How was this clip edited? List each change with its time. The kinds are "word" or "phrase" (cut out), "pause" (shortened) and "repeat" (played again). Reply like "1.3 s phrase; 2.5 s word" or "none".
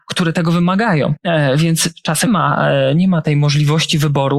2.3 s word